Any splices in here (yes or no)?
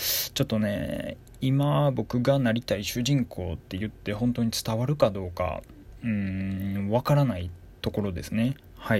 no